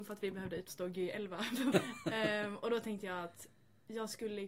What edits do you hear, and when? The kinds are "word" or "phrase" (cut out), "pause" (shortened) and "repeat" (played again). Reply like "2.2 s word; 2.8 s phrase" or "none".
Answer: 1.7 s word